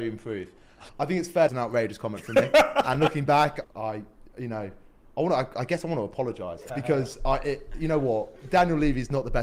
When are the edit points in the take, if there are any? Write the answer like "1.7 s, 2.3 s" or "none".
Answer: 1.5 s